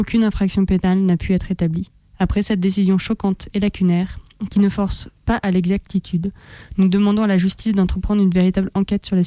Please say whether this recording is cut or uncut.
cut